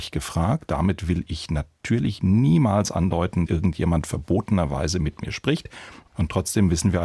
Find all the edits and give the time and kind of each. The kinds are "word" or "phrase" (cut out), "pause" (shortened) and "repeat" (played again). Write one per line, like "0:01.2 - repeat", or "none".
0:03.5 - word